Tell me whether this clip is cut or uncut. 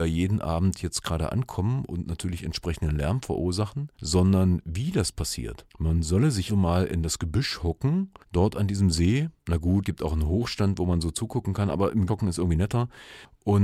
cut